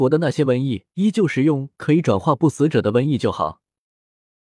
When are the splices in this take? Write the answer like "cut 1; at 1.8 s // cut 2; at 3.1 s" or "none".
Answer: cut 1; at 0.9 s